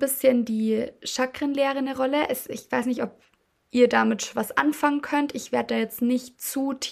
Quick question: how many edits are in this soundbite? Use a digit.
0